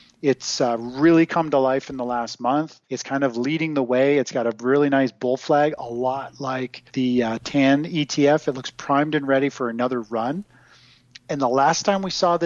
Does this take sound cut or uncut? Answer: cut